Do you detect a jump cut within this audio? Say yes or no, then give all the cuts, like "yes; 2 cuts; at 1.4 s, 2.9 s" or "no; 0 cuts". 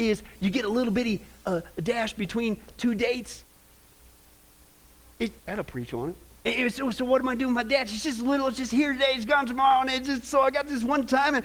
yes; 2 cuts; at 5.4 s, 6.3 s